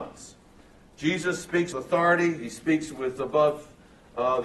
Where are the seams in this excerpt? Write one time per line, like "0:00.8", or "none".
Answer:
0:01.7
0:03.2